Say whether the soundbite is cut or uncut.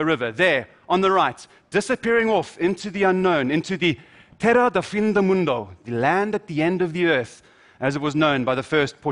uncut